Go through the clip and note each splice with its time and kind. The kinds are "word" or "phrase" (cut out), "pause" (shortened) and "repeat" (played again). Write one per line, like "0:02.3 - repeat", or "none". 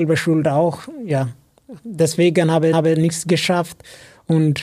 0:01.8 - word
0:02.7 - repeat